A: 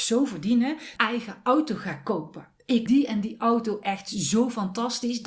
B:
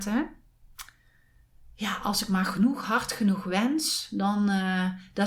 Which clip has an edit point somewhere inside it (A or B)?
A